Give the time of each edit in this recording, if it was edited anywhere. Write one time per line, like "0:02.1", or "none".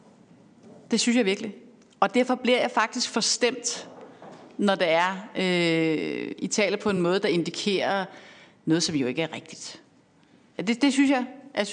none